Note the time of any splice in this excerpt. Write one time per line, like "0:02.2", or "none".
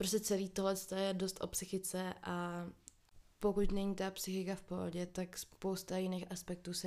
none